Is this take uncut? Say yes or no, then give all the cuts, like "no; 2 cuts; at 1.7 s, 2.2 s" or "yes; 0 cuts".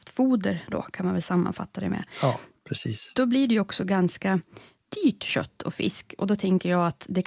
yes; 0 cuts